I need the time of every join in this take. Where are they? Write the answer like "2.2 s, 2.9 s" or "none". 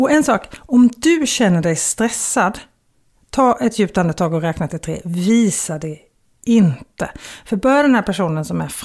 none